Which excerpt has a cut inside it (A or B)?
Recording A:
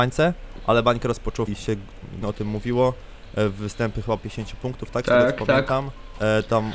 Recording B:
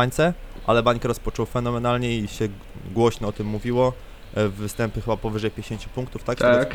A